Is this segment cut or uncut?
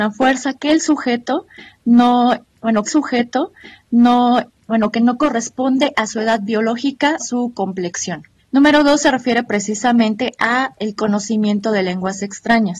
cut